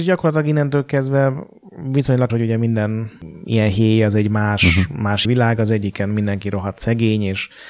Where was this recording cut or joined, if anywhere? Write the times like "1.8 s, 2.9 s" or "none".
2.3 s, 5.2 s

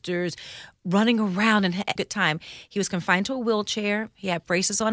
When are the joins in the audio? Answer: 2.0 s

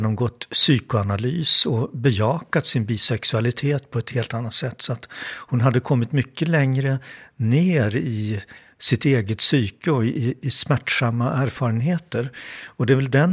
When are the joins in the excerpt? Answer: none

